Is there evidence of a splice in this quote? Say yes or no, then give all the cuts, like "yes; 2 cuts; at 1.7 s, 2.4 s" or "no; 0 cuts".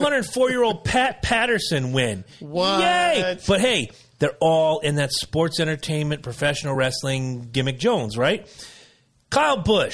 no; 0 cuts